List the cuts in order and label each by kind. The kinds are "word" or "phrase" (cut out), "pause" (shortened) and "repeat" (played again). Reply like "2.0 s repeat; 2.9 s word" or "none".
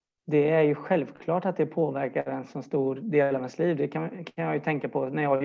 none